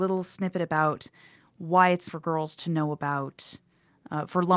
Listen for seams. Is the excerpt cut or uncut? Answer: cut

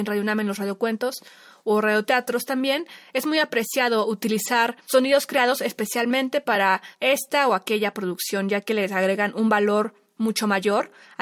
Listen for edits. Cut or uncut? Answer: uncut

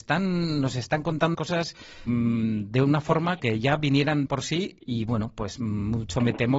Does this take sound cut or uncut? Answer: cut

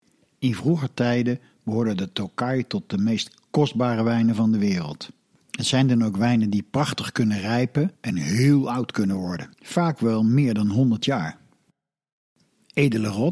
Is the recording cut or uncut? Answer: cut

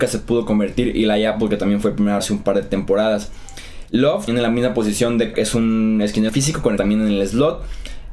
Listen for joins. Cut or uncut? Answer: cut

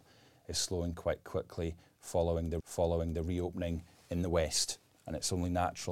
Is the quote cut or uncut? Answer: cut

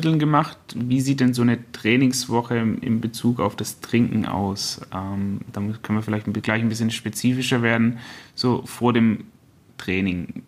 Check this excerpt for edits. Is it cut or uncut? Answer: uncut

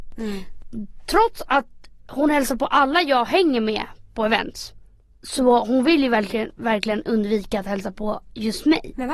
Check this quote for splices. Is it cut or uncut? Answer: uncut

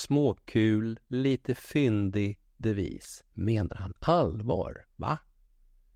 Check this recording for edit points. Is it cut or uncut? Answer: cut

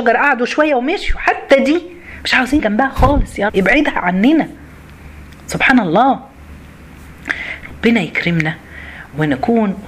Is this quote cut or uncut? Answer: cut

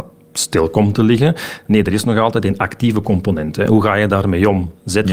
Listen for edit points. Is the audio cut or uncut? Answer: uncut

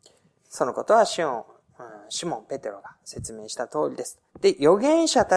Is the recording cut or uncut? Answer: cut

